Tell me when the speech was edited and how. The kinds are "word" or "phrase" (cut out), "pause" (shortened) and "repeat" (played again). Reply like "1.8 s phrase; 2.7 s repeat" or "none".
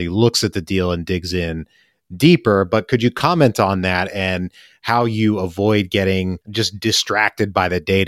6.4 s pause